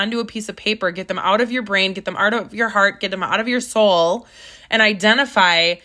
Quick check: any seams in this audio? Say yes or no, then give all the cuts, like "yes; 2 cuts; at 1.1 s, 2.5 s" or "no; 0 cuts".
no; 0 cuts